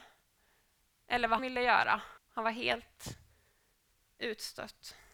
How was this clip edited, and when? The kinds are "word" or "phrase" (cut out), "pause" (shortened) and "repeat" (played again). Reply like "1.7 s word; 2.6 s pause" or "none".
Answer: 1.4 s word; 2.2 s pause